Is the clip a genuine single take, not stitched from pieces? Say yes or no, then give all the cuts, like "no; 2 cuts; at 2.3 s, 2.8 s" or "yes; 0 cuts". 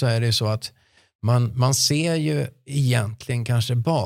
yes; 0 cuts